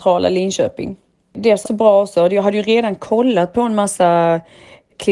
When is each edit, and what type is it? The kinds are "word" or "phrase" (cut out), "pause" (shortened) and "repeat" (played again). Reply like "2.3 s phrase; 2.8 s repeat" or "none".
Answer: 1.6 s word